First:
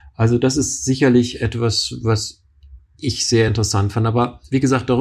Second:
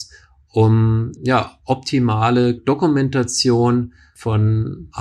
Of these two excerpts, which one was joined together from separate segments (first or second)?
second